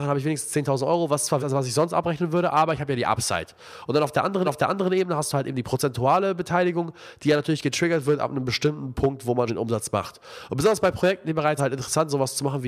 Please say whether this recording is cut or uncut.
cut